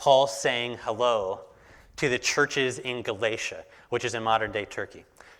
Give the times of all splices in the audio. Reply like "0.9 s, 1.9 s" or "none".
none